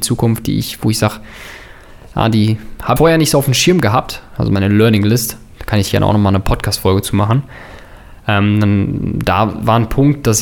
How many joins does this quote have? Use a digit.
1